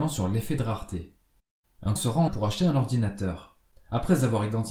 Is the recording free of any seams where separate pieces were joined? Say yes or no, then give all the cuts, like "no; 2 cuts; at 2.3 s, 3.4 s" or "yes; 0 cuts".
no; 2 cuts; at 2.0 s, 2.3 s